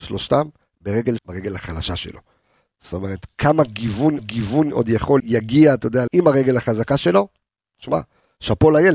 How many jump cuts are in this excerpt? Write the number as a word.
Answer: four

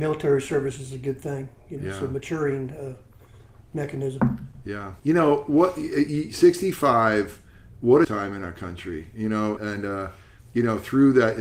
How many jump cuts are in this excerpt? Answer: three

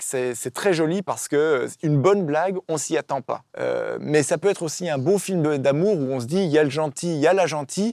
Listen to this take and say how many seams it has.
one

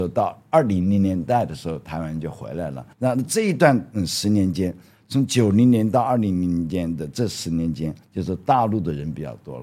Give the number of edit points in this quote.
two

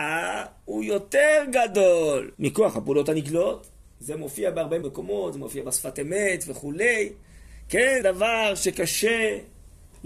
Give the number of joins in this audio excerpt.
four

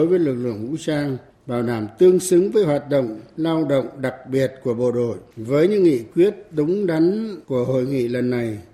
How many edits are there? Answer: three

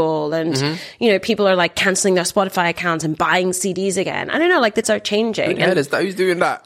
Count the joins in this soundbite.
one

